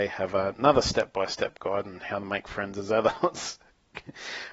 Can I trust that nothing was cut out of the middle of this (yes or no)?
yes